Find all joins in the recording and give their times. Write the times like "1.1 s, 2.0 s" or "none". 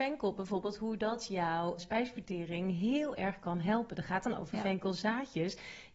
1.8 s